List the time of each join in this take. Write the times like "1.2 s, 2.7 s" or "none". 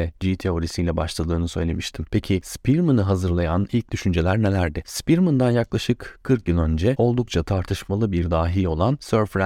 none